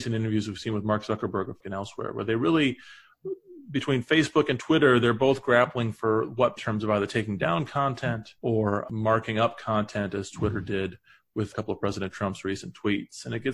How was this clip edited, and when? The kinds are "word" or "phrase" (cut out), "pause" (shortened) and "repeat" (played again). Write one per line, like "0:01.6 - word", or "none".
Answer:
0:01.6 - word
0:06.6 - phrase
0:08.4 - pause